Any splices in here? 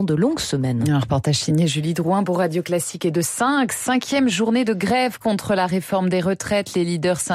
no; 0 cuts

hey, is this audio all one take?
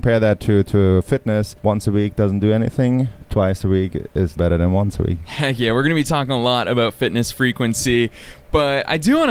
no; 2 cuts; at 1.6 s, 4.4 s

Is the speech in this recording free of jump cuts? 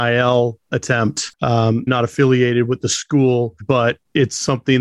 no; 2 cuts; at 1.9 s, 3.6 s

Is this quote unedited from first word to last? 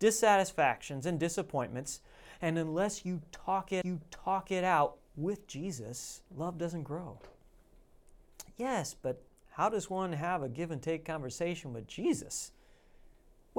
no; 3 cuts; at 3.8 s, 6.3 s, 9.3 s

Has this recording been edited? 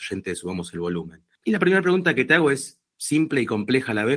no; 0 cuts

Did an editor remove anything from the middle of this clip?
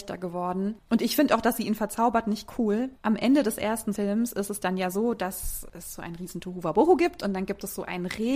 no; 0 cuts

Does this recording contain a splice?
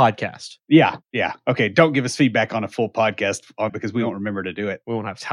yes; 2 cuts; at 1.0 s, 3.7 s

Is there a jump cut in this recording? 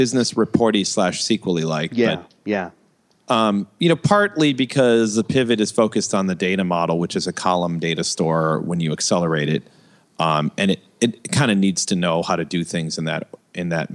no; 0 cuts

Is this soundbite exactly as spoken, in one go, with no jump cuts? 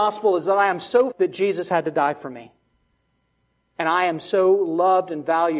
no; 1 cut; at 1.1 s

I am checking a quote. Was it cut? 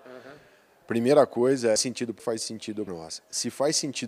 yes; 3 cuts; at 1.8 s, 2.2 s, 2.9 s

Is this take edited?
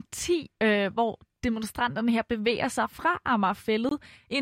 no; 0 cuts

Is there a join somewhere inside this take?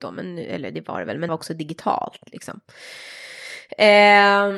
yes; 1 cut; at 1.3 s

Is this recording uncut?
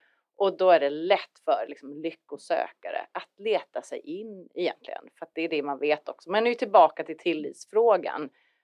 yes; 0 cuts

